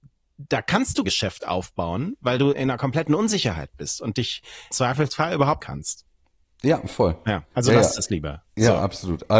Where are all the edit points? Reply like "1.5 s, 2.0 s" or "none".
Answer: 1.0 s, 2.5 s, 4.7 s, 5.6 s, 7.5 s